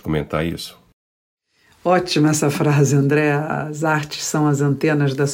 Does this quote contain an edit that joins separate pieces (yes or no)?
no